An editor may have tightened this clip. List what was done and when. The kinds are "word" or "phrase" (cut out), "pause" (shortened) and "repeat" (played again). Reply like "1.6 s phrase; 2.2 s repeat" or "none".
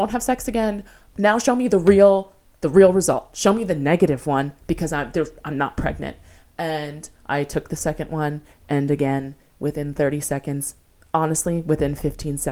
1.1 s word